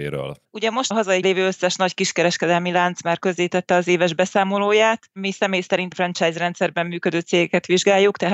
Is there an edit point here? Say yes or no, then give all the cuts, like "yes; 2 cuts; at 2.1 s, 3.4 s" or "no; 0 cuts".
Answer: yes; 3 cuts; at 0.9 s, 1.2 s, 5.9 s